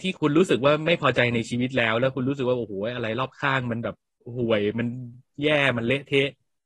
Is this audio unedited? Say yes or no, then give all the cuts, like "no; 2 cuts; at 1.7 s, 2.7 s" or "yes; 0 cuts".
yes; 0 cuts